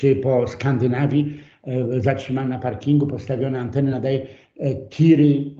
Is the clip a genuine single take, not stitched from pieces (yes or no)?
yes